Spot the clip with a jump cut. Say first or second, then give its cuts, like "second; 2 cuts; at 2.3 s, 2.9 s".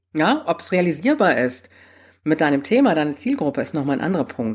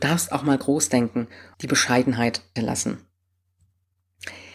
second; 2 cuts; at 1.5 s, 2.6 s